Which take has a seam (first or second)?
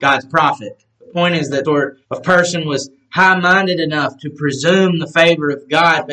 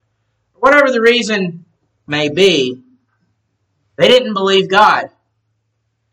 first